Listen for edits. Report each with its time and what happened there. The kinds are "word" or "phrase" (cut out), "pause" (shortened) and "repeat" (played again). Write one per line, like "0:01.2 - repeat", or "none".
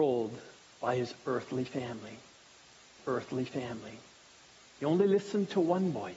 0:03.0 - repeat